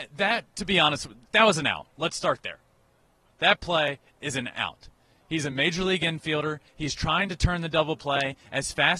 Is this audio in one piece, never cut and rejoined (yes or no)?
yes